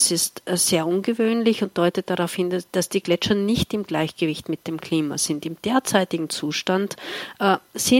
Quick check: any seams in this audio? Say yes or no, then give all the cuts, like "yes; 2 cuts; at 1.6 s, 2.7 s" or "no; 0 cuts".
no; 0 cuts